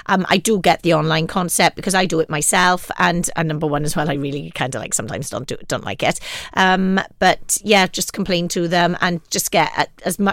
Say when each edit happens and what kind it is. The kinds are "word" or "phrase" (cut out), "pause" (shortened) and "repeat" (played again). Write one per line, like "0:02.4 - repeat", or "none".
none